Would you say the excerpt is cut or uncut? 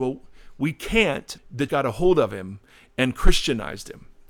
cut